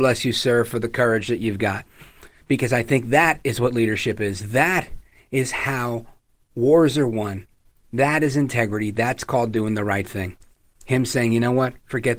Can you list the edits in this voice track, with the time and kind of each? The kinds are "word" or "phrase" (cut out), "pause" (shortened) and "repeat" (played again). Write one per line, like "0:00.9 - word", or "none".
none